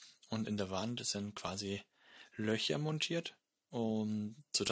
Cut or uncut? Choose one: uncut